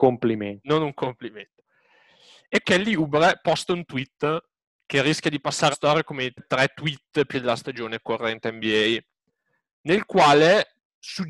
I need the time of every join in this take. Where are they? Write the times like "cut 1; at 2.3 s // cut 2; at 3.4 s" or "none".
cut 1; at 2.6 s // cut 2; at 5.7 s // cut 3; at 6.4 s // cut 4; at 7.3 s